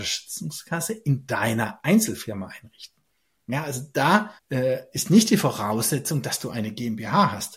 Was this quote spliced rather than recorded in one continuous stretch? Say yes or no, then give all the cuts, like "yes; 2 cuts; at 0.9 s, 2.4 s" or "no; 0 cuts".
yes; 1 cut; at 4.4 s